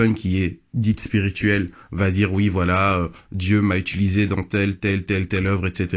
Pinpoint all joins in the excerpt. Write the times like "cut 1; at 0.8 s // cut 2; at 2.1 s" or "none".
none